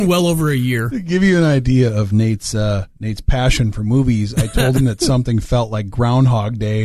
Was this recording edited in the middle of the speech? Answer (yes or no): yes